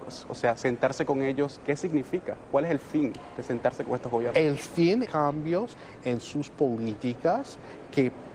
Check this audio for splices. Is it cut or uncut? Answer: cut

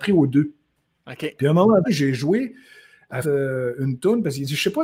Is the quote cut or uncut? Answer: cut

